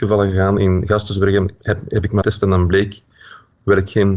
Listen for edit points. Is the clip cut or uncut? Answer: cut